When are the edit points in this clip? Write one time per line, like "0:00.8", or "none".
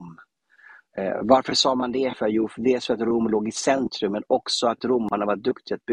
none